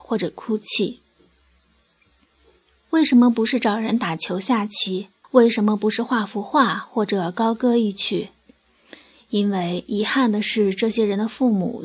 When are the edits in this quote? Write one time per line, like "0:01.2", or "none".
0:05.2